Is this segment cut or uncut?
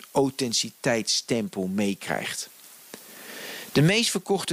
uncut